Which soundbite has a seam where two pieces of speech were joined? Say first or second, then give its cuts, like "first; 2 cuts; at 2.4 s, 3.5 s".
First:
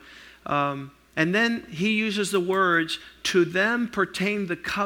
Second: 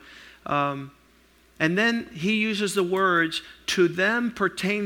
first; 1 cut; at 1.0 s